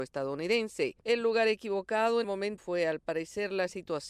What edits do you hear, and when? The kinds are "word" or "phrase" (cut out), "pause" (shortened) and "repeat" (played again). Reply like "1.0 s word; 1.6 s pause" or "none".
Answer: 2.2 s word; 2.6 s word